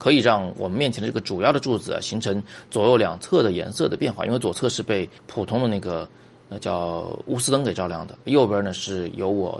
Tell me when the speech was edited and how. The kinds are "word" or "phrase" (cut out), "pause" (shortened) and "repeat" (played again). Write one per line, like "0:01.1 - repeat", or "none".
0:05.2 - pause